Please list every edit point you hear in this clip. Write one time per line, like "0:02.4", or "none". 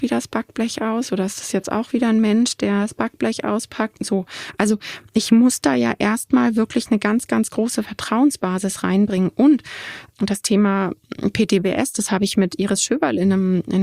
0:10.1